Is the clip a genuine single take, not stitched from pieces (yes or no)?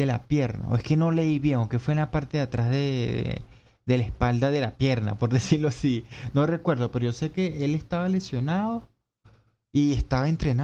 yes